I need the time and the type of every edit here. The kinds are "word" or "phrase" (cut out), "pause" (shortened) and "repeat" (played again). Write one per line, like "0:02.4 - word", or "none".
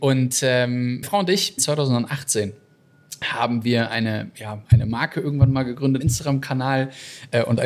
0:01.0 - word
0:01.6 - word
0:04.7 - word
0:06.0 - word